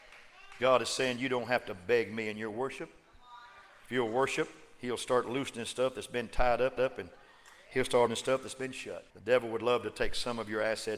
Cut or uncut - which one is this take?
cut